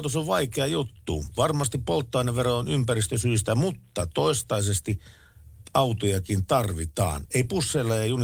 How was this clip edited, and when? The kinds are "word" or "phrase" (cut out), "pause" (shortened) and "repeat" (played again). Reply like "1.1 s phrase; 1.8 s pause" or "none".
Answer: none